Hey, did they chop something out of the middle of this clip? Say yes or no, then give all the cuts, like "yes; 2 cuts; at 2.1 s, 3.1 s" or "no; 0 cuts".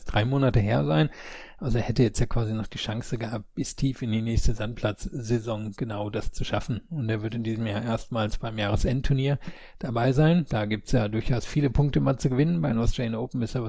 no; 0 cuts